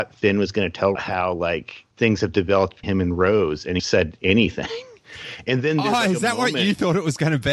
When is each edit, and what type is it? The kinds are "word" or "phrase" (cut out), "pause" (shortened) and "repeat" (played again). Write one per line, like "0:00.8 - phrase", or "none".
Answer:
0:00.9 - phrase
0:01.9 - pause
0:02.8 - word
0:03.8 - word